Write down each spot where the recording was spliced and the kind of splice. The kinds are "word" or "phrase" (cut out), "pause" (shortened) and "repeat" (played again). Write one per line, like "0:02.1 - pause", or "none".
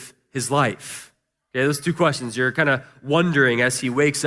none